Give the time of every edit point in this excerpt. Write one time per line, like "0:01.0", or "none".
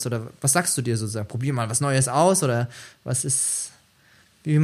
none